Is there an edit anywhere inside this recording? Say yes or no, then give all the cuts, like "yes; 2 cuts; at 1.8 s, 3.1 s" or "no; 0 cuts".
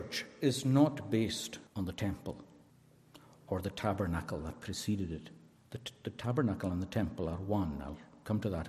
yes; 3 cuts; at 1.7 s, 2.7 s, 5.5 s